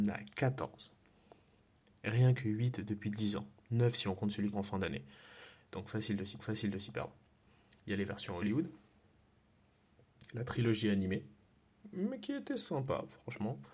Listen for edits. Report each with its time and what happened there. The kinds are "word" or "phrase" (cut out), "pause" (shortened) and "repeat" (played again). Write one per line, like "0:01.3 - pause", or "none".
0:04.5 - word
0:06.4 - repeat